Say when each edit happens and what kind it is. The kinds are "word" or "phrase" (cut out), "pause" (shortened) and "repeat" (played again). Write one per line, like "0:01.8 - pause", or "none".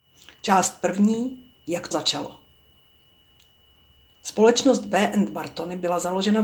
0:01.5 - pause
0:01.9 - word